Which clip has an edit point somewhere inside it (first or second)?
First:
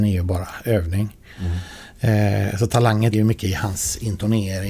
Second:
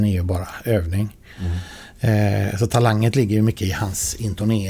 first